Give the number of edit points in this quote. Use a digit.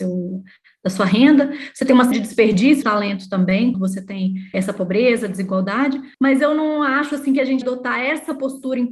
6